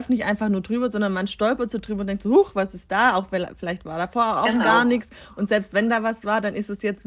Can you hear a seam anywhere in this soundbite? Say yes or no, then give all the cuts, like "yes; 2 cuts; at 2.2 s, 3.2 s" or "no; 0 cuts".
no; 0 cuts